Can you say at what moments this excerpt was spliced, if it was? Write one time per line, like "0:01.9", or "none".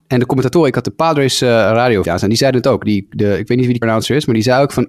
0:02.0
0:03.8